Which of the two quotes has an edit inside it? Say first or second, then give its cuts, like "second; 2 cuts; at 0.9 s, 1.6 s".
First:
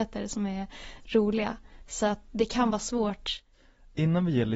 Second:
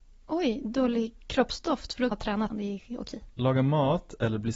second; 4 cuts; at 1.1 s, 2.1 s, 2.5 s, 3.3 s